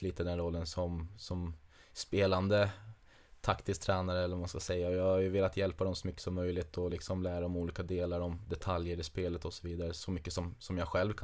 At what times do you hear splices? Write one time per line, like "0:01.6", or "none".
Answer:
none